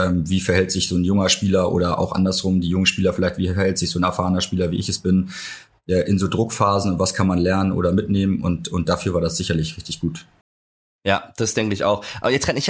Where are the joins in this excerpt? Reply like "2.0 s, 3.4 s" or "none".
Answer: none